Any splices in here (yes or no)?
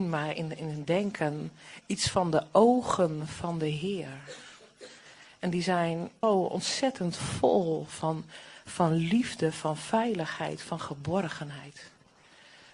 yes